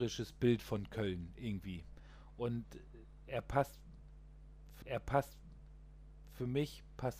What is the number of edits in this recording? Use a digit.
1